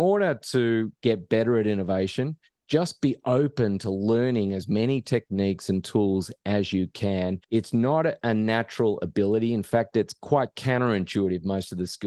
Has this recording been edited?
yes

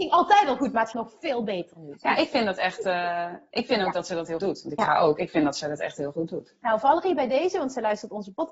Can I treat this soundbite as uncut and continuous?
no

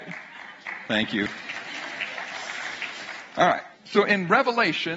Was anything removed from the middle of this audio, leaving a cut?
yes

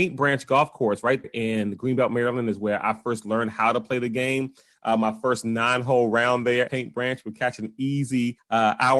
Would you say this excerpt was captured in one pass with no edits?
no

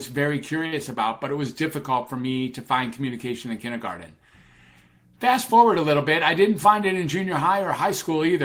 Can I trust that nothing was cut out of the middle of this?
yes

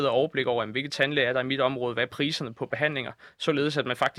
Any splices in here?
no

